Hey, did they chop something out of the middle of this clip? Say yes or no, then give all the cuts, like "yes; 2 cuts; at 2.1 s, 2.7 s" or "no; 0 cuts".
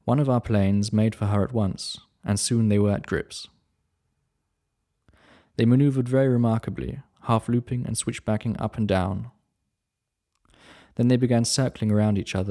no; 0 cuts